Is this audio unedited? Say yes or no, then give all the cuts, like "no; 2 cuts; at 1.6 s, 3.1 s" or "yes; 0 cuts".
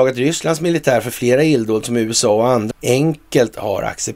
no; 1 cut; at 2.7 s